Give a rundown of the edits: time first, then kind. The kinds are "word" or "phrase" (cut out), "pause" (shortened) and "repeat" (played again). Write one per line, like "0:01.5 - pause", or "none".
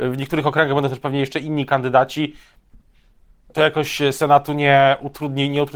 none